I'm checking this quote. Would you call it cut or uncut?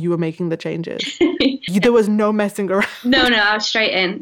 cut